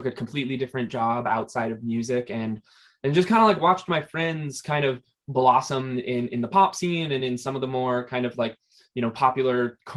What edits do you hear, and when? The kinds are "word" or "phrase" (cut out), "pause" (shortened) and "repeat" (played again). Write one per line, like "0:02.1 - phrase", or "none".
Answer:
none